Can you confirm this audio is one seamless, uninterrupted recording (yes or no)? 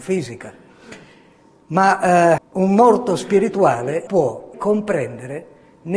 no